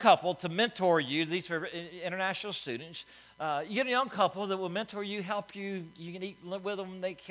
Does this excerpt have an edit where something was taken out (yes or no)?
no